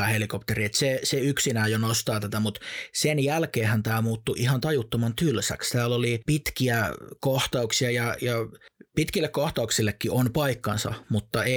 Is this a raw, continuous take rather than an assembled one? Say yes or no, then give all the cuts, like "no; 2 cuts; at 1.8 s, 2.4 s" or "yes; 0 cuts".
yes; 0 cuts